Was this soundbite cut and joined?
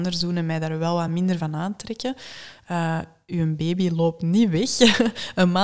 no; 0 cuts

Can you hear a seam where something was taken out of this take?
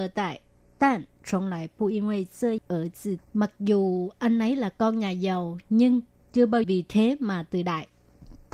yes; 3 cuts; at 2.6 s, 3.2 s, 6.6 s

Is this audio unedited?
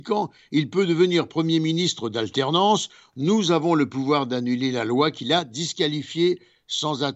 yes; 0 cuts

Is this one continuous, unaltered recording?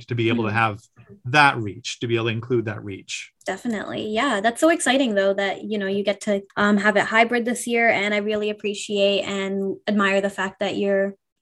no; 2 cuts; at 3.4 s, 6.5 s

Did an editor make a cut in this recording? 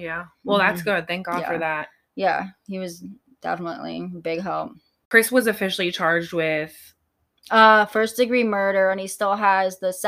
no; 0 cuts

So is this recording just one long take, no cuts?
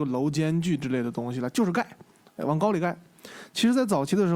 yes; 0 cuts

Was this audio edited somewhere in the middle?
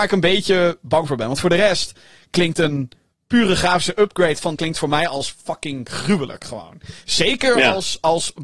yes; 1 cut; at 4.6 s

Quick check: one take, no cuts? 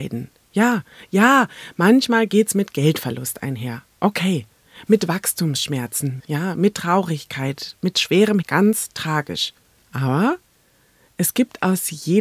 no; 2 cuts; at 6.2 s, 8.4 s

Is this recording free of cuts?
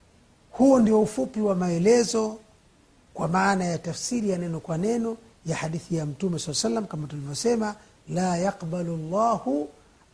yes; 0 cuts

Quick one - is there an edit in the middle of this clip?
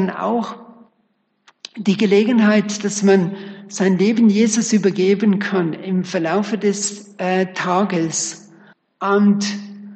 yes; 1 cut; at 8.7 s

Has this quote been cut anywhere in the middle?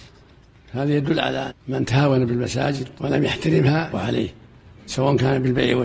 yes; 3 cuts; at 1.5 s, 3.0 s, 3.9 s

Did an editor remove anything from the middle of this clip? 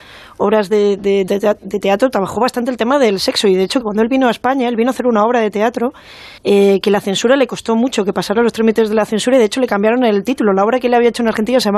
yes; 3 cuts; at 1.3 s, 3.8 s, 6.4 s

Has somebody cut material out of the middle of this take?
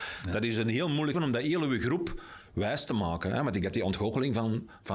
yes; 2 cuts; at 1.1 s, 3.6 s

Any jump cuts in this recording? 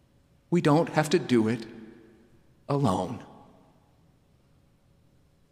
no; 0 cuts

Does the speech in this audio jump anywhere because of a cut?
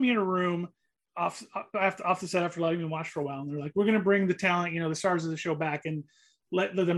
no; 0 cuts

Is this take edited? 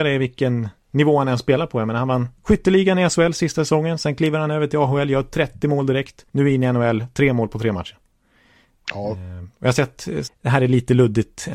yes; 2 cuts; at 6.3 s, 10.3 s

